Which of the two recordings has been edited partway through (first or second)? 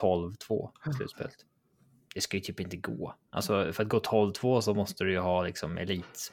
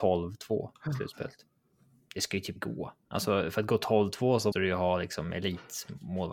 second